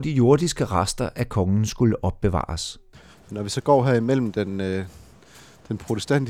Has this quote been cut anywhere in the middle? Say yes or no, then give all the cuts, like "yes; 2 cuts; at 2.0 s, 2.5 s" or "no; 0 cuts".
yes; 1 cut; at 2.9 s